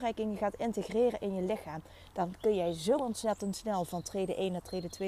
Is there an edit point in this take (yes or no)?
no